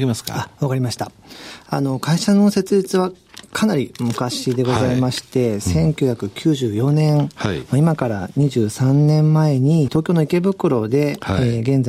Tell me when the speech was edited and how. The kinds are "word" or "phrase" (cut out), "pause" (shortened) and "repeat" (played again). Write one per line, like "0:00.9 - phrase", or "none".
0:09.9 - phrase